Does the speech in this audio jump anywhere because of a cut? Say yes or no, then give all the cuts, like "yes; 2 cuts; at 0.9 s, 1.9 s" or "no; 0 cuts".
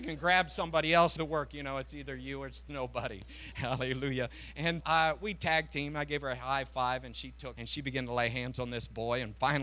yes; 3 cuts; at 1.2 s, 4.8 s, 7.5 s